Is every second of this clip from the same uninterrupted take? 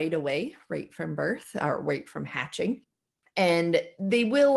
yes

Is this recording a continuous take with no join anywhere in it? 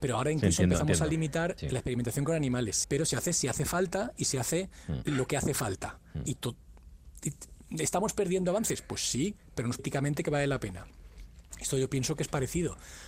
no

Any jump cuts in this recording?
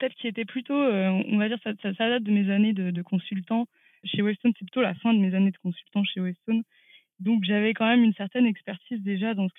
no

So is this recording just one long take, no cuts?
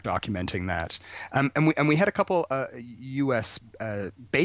yes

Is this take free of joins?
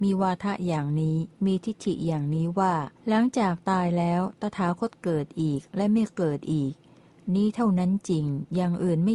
no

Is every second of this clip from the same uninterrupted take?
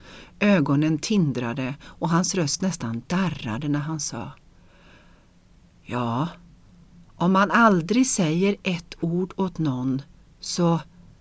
yes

